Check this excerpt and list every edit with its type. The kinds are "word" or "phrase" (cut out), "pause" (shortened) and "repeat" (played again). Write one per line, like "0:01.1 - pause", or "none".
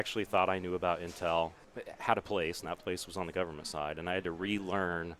none

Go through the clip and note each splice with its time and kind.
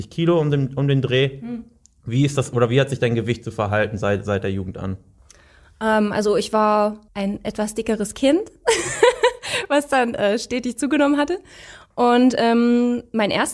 none

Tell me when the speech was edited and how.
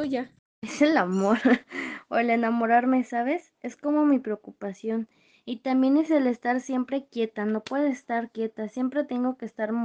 none

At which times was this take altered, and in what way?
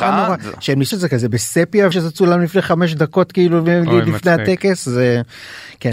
0:00.9 - word
0:01.9 - word

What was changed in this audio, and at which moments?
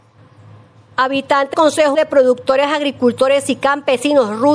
0:01.5 - word
0:01.9 - word

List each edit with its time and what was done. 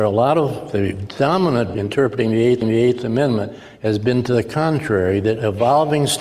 0:01.7 - word
0:02.6 - repeat

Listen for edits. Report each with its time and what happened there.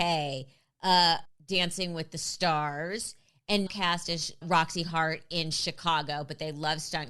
0:01.2 - word
0:03.7 - word
0:04.4 - word

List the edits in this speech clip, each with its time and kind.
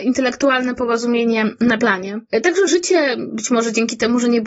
0:01.8 - word
0:02.7 - phrase

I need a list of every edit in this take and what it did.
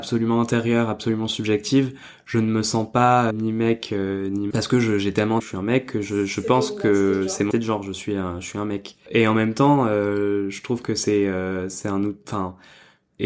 0:03.3 - word
0:04.5 - word
0:05.4 - word
0:07.5 - word

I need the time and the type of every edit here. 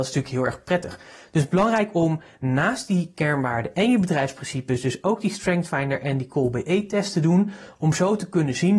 none

